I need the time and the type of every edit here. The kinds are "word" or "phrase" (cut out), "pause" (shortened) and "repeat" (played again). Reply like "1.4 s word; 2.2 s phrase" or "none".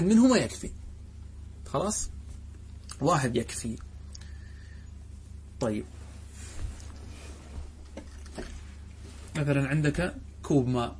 3.3 s word; 9.3 s word